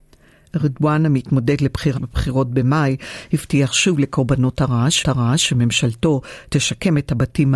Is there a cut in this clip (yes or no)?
yes